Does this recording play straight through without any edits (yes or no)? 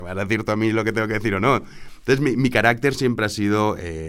yes